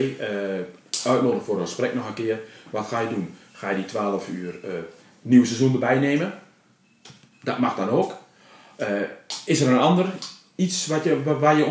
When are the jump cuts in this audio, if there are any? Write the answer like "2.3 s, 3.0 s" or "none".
none